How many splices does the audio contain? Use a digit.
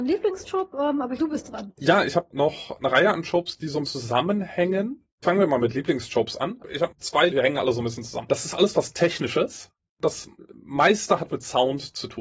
7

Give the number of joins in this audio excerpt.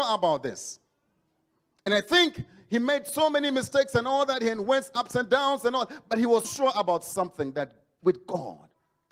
1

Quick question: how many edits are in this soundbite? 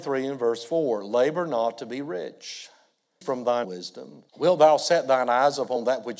3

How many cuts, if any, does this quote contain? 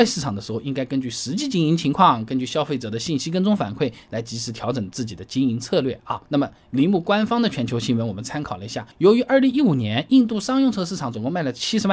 2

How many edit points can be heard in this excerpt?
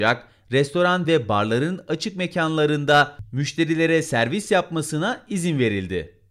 0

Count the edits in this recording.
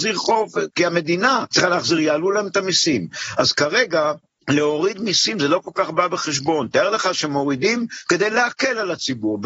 0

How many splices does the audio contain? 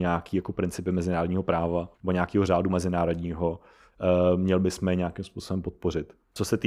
1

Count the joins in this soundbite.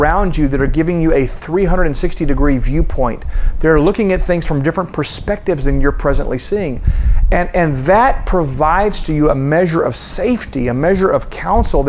0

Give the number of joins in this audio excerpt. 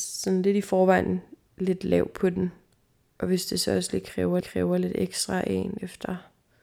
1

